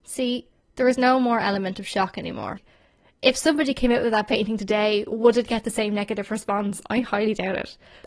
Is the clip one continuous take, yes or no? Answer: yes